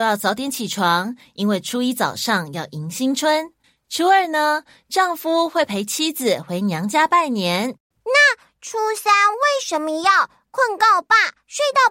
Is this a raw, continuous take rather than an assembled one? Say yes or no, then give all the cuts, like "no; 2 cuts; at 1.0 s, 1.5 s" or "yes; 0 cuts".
yes; 0 cuts